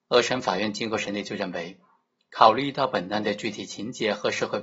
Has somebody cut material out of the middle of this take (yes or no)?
no